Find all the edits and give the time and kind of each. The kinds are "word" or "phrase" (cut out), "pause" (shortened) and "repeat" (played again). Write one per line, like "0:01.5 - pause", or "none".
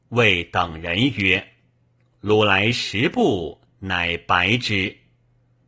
none